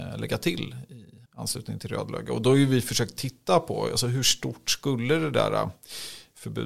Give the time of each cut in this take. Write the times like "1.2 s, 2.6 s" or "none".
1.3 s